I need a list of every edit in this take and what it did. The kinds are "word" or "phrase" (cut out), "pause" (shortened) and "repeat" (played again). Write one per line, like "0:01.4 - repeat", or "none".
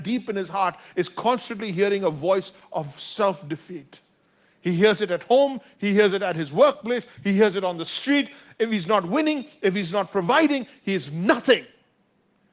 none

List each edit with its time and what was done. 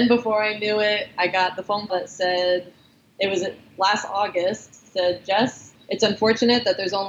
0:01.9 - word
0:05.7 - word

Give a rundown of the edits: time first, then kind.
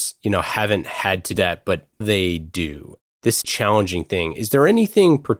0:01.4 - word
0:02.0 - word
0:03.4 - phrase

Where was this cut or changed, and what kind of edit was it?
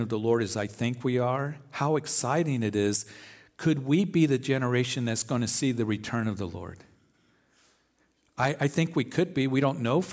none

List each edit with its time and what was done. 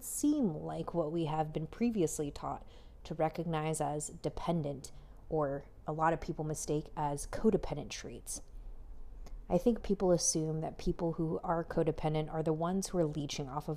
0:09.8 - word

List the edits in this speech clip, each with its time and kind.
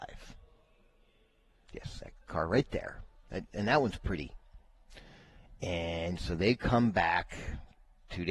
none

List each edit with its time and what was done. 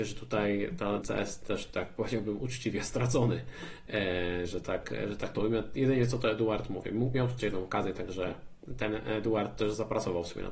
0:01.0 - word
0:01.7 - word
0:07.4 - word

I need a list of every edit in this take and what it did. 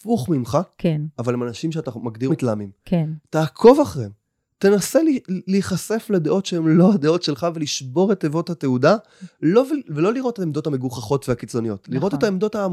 0:02.3 - phrase

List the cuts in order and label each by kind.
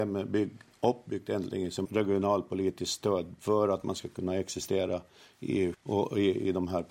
0:01.8 - word
0:05.7 - word

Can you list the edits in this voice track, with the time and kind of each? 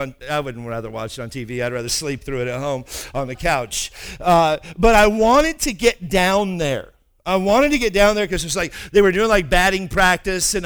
none

